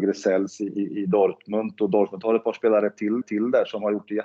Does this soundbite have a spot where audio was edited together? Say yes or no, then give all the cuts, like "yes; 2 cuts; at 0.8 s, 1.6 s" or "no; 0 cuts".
yes; 1 cut; at 3.2 s